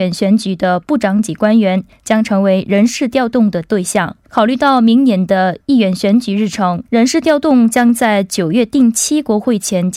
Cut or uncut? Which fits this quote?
cut